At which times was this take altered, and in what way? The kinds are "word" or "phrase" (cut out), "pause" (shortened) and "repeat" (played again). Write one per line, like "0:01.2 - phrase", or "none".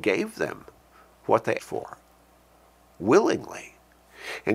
0:01.6 - word